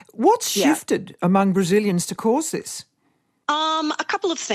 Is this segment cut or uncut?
uncut